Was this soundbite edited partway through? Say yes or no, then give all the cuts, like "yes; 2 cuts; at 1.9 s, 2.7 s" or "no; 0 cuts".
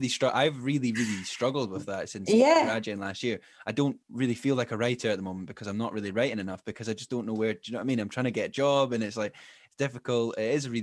no; 0 cuts